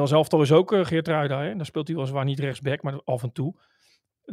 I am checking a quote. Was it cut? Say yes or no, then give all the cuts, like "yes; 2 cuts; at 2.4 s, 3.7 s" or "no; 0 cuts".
no; 0 cuts